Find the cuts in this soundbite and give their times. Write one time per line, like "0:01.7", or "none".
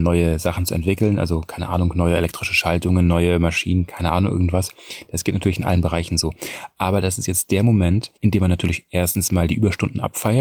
0:08.2